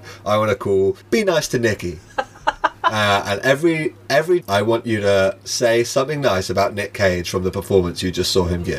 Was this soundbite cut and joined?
yes; 2 cuts; at 1.0 s, 4.4 s

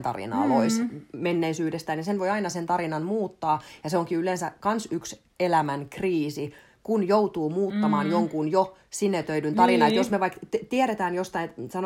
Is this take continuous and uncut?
yes; 0 cuts

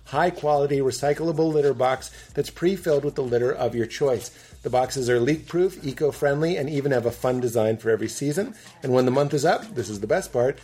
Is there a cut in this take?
no; 0 cuts

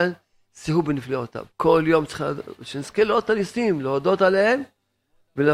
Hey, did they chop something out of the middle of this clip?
yes; 1 cut; at 1.5 s

